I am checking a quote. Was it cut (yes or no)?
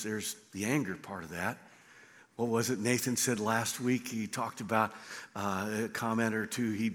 no